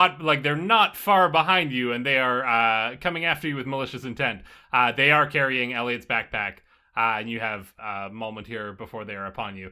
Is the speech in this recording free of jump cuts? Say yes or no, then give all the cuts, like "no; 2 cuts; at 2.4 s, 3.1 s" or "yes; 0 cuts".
yes; 0 cuts